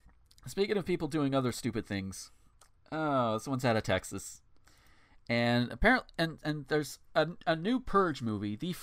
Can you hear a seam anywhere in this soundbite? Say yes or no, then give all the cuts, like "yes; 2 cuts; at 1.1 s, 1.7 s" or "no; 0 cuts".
no; 0 cuts